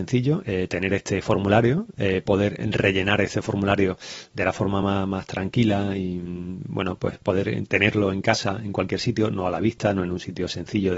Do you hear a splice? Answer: no; 0 cuts

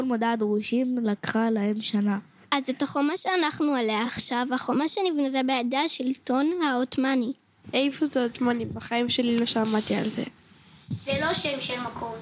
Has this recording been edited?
no; 0 cuts

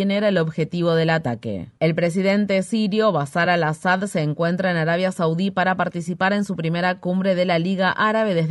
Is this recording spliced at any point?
no; 0 cuts

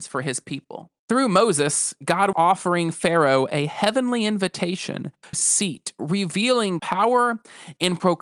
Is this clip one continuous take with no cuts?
no; 4 cuts; at 1.0 s, 2.3 s, 5.3 s, 6.8 s

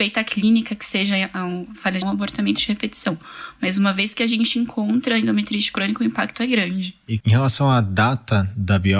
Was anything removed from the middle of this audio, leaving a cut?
yes; 2 cuts; at 2.0 s, 7.2 s

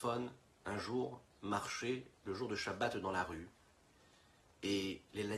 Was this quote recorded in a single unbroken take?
yes; 0 cuts

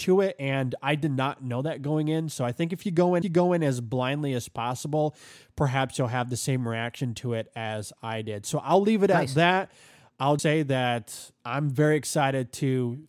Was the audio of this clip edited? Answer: yes; 3 cuts; at 3.2 s, 10.4 s, 11.4 s

